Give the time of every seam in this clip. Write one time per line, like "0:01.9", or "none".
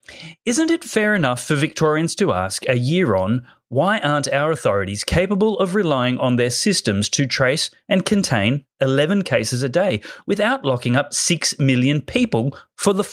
none